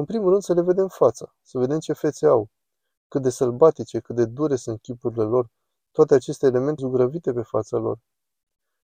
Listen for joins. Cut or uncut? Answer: cut